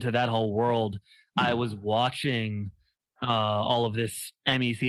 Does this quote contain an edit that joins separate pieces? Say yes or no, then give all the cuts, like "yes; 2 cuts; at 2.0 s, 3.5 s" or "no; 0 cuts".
no; 0 cuts